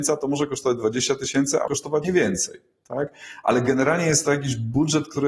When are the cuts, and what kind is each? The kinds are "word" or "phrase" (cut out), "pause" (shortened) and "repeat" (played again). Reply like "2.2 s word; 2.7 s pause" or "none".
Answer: 1.7 s word; 2.0 s word